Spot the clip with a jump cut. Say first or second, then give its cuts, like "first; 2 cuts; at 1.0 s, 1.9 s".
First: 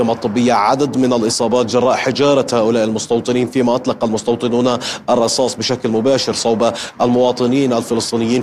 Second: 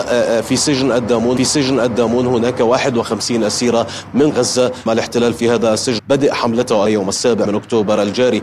second; 6 cuts; at 1.4 s, 4.3 s, 4.9 s, 6.0 s, 6.9 s, 7.4 s